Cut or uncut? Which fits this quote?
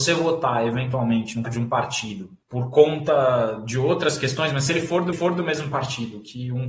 cut